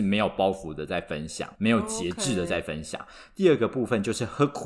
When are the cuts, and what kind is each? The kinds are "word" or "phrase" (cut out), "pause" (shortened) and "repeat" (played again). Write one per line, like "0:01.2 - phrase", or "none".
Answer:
0:01.5 - pause